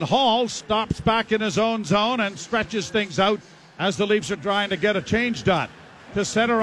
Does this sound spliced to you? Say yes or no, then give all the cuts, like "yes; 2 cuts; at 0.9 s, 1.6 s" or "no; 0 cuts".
no; 0 cuts